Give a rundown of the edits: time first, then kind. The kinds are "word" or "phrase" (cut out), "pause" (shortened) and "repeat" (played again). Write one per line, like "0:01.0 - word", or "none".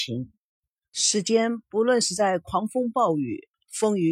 none